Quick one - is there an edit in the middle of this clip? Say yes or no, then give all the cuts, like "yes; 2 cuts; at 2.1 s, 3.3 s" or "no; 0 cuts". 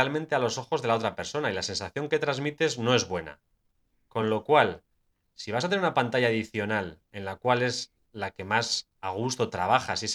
no; 0 cuts